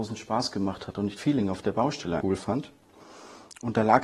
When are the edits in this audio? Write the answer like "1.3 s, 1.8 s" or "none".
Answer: 1.2 s, 2.2 s

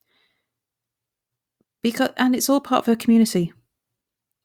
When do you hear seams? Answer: none

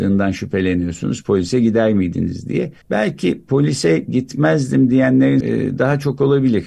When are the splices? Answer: 2.8 s, 5.4 s

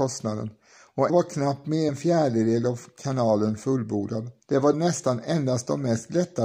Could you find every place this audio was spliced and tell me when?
1.1 s, 1.9 s, 4.4 s, 4.7 s

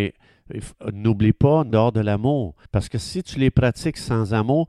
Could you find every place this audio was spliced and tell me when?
1.7 s, 2.6 s

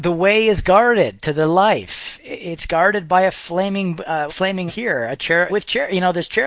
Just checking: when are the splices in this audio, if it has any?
4.3 s, 4.7 s, 5.5 s

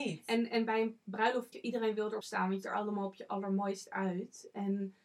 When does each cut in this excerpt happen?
1.5 s, 2.2 s, 2.6 s

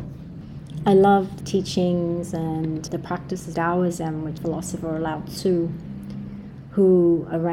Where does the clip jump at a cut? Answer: 1.4 s, 2.9 s, 3.5 s, 4.4 s

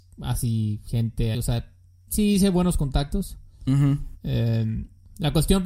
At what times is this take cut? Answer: 1.3 s, 2.1 s

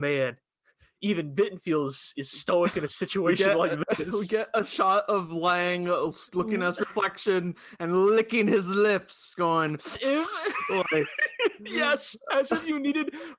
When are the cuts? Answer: none

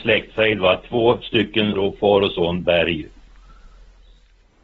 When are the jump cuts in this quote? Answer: 1.7 s

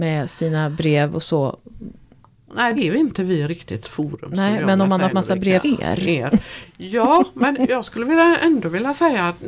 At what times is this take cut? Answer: 2.8 s, 3.8 s, 5.1 s, 5.6 s

